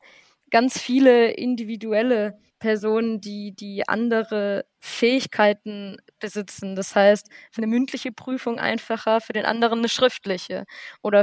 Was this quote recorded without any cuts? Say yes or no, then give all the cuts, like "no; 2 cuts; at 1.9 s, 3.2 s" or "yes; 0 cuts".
no; 3 cuts; at 2.5 s, 4.7 s, 7.6 s